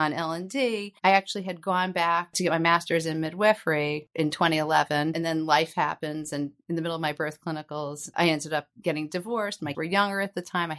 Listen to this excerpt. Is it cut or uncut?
cut